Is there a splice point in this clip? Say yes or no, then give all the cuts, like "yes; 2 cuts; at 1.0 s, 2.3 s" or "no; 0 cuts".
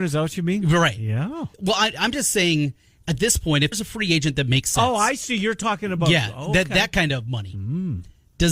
yes; 2 cuts; at 1.5 s, 3.7 s